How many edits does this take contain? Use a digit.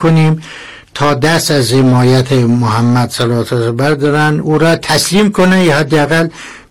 0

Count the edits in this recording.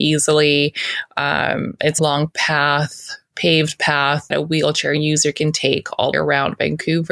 3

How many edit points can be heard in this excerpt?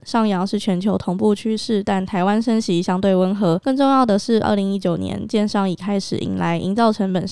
1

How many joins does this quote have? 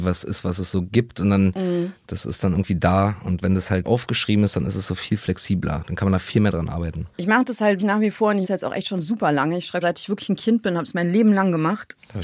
6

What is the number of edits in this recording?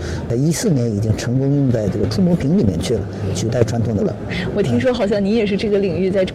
1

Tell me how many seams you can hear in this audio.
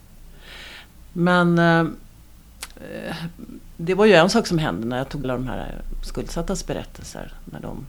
1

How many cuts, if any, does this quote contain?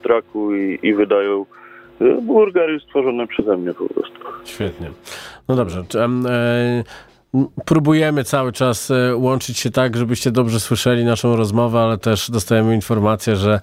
0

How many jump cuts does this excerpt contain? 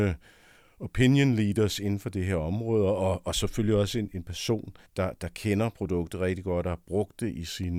1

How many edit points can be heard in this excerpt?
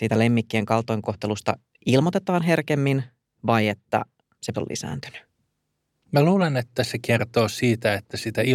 1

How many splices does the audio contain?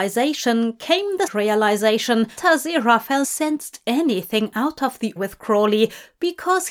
4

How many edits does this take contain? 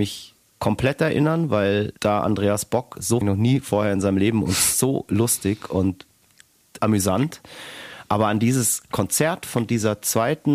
3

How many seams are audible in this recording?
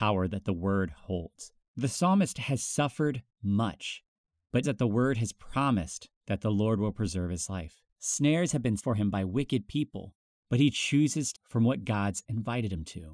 5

